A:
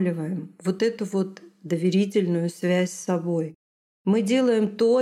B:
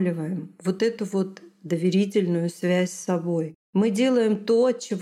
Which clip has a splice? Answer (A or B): B